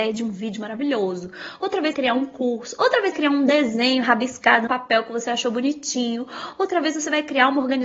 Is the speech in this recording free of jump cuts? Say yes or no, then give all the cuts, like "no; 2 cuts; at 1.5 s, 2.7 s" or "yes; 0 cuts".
no; 3 cuts; at 1.9 s, 3.1 s, 4.7 s